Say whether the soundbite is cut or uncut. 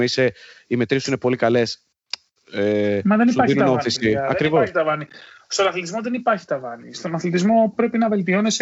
uncut